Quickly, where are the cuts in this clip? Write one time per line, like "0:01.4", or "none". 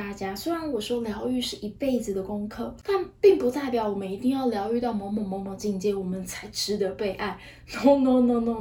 none